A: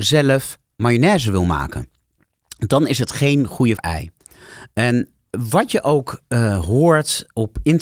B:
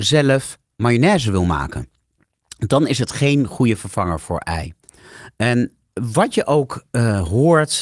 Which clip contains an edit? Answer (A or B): A